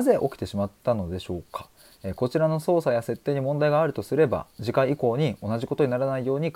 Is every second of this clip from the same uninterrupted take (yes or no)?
yes